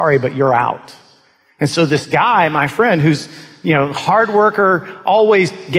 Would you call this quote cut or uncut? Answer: uncut